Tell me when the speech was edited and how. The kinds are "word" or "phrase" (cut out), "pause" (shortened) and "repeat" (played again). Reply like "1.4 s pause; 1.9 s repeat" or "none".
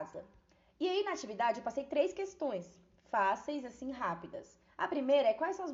none